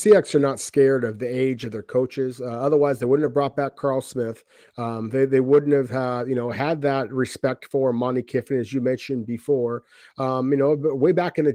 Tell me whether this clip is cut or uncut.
uncut